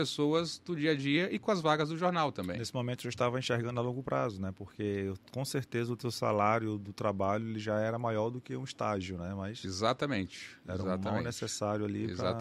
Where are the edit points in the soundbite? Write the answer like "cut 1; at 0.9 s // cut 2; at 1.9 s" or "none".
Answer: none